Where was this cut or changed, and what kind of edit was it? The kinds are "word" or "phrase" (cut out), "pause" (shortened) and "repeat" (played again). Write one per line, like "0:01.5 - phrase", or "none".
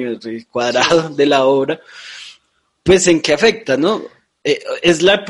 none